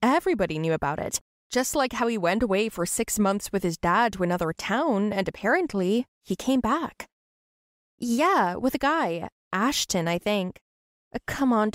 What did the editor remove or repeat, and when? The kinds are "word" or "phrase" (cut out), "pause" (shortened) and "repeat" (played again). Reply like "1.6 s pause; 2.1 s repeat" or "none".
none